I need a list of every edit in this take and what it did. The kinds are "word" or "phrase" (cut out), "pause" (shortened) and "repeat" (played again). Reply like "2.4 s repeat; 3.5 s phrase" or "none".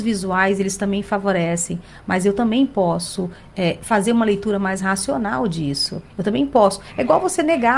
6.1 s pause